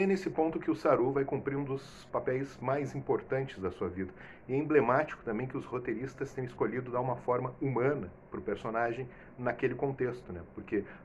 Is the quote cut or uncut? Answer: uncut